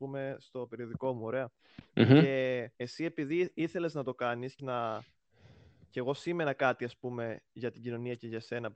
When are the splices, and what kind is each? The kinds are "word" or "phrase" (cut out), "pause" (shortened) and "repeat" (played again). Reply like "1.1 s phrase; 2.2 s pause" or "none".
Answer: 2.7 s pause; 4.6 s word